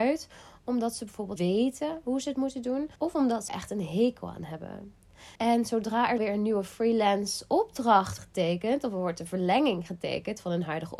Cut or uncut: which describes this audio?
cut